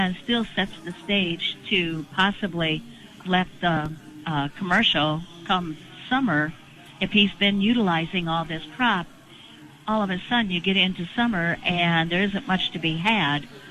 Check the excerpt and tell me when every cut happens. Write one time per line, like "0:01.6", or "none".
0:03.2